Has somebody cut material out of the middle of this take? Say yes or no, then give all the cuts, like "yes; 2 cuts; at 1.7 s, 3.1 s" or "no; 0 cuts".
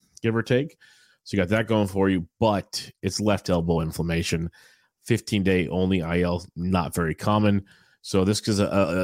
no; 0 cuts